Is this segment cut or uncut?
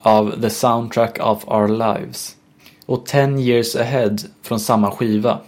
cut